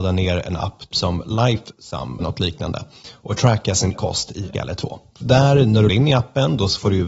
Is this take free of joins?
no; 6 cuts; at 0.9 s, 2.2 s, 3.9 s, 4.5 s, 5.2 s, 5.9 s

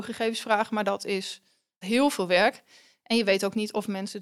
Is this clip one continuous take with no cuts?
no; 1 cut; at 1.8 s

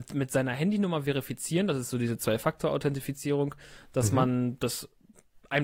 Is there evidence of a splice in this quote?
no; 0 cuts

